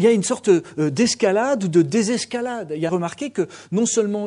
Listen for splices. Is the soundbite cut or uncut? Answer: cut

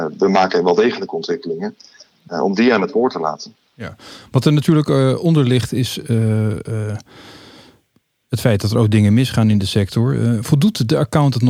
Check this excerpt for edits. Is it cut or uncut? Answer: uncut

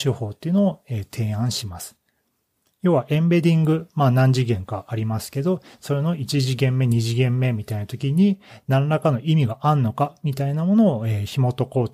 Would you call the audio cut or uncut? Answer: uncut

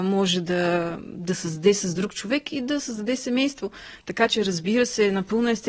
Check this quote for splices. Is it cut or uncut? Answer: uncut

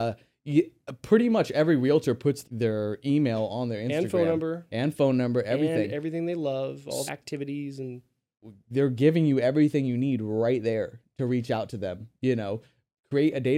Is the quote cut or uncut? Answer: cut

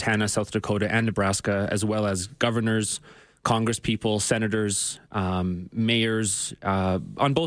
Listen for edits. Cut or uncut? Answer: uncut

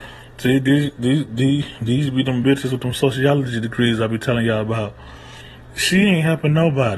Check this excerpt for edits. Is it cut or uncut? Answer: uncut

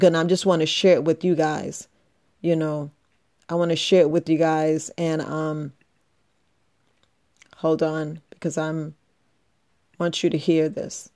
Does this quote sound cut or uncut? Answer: uncut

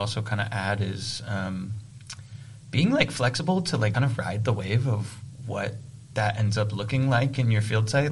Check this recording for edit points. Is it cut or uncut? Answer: cut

